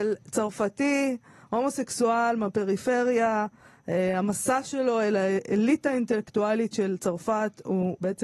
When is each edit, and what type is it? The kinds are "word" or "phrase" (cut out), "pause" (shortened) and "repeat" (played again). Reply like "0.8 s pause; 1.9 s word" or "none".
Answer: none